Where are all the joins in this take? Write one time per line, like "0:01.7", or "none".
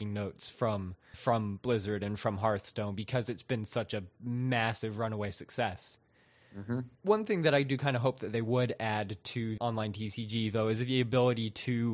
0:01.1
0:06.9
0:09.6

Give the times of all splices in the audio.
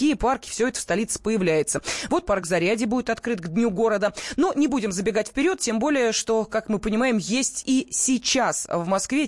none

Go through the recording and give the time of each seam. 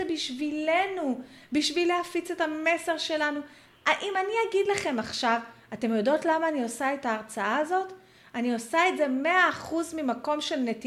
none

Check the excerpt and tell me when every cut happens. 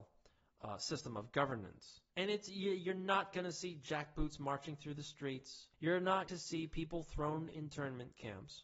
0:02.1
0:05.7
0:06.3
0:07.5

